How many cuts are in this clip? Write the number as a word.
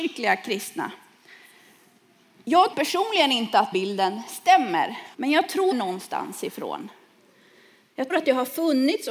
five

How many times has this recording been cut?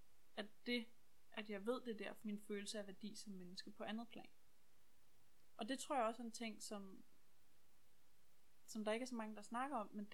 one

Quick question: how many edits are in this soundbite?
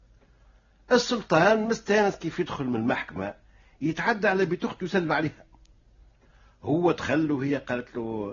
zero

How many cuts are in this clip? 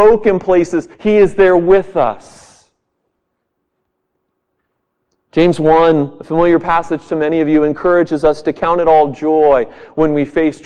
one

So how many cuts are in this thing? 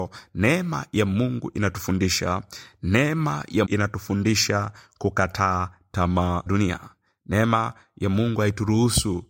two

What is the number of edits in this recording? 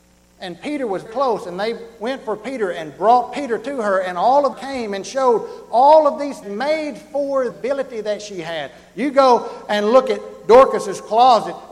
four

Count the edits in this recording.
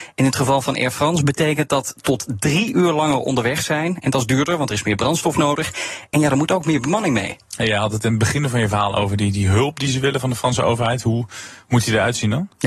zero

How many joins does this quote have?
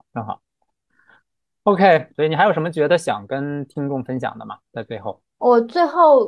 one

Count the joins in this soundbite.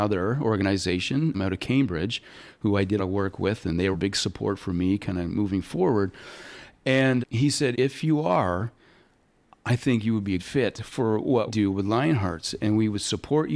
seven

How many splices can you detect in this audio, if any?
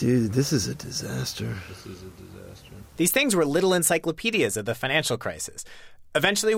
one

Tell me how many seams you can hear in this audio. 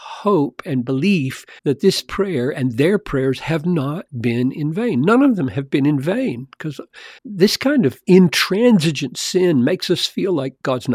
two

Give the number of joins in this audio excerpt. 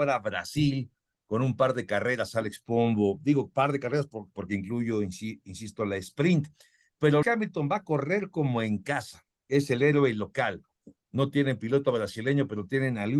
one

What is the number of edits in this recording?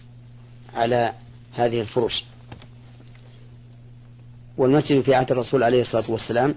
one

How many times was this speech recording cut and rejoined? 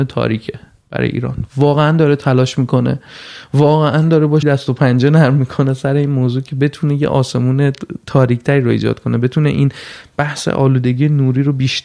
one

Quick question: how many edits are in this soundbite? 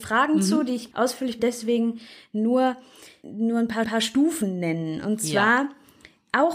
four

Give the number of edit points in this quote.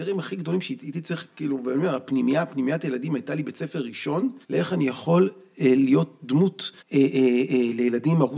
two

